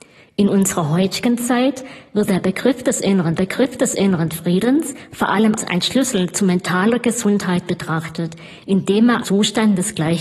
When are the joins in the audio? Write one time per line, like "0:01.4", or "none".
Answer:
0:03.4
0:05.6
0:09.2